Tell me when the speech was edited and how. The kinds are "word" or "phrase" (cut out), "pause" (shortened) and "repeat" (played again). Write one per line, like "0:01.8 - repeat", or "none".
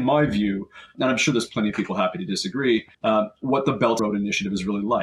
0:00.9 - word
0:02.9 - pause
0:04.0 - word